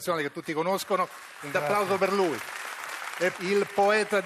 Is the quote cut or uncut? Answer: cut